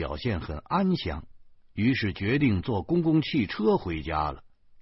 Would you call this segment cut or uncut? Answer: uncut